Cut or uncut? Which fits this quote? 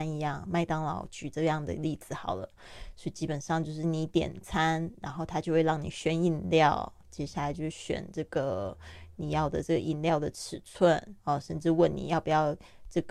cut